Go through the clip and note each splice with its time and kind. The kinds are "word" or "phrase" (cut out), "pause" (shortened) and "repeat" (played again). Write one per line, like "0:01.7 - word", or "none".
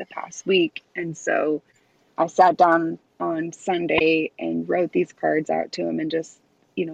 none

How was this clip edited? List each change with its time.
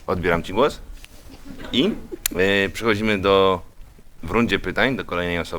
none

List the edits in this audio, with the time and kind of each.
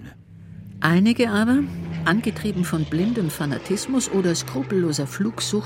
none

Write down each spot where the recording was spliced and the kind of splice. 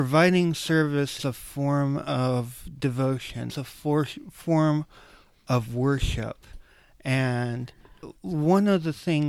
0:01.2 - word
0:03.5 - word

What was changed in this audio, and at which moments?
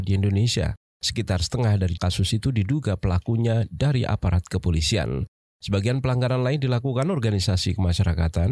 0:02.0 - word

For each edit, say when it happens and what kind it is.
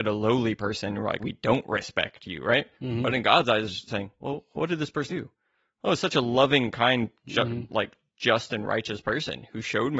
0:01.2 - word
0:02.7 - pause
0:03.9 - phrase
0:05.1 - word

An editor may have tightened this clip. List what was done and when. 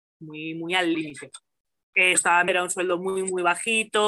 0:00.9 - phrase
0:02.1 - word
0:02.5 - word

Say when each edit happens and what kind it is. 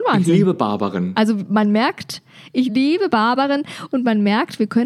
none

